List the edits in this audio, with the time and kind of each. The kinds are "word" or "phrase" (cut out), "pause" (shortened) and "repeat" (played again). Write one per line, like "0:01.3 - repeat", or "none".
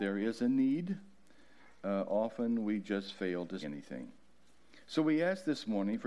0:03.6 - word